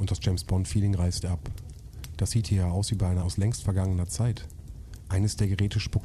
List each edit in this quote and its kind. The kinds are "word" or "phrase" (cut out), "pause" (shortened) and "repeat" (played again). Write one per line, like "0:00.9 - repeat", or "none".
0:01.2 - word
0:03.2 - word